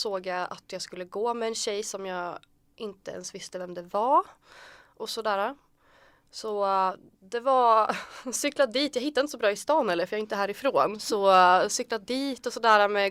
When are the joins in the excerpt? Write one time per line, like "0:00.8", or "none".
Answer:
none